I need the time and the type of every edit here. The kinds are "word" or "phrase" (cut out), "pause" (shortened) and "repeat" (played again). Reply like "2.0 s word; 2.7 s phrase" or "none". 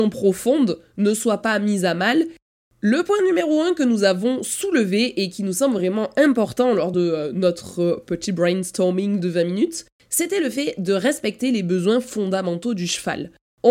none